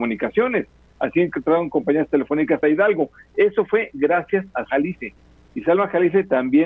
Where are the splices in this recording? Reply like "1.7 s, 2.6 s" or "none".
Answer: 2.6 s, 4.7 s